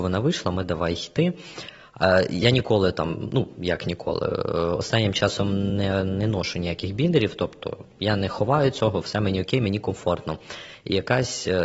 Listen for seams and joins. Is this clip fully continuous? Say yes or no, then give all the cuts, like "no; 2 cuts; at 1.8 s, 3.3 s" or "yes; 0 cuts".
yes; 0 cuts